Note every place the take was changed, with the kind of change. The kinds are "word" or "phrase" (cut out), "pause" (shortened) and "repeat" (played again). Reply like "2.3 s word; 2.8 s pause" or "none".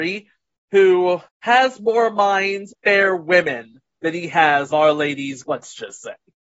1.3 s pause; 2.7 s phrase; 4.7 s word; 5.4 s word